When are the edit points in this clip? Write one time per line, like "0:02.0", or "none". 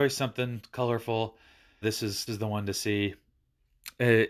0:01.8
0:02.3